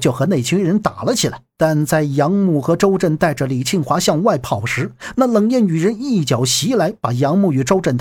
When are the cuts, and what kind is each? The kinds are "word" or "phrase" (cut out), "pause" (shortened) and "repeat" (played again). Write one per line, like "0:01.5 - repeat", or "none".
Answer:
0:01.5 - pause